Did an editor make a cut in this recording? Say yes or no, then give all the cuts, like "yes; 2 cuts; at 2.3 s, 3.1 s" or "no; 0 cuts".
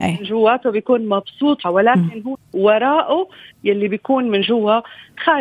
yes; 3 cuts; at 1.6 s, 2.3 s, 3.5 s